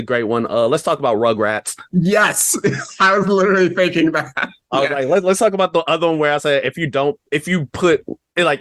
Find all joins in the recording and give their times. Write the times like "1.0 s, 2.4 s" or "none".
none